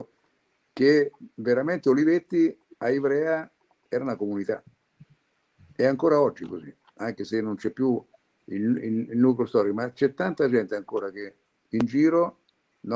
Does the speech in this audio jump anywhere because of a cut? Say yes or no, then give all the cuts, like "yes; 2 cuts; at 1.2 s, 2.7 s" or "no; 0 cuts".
no; 0 cuts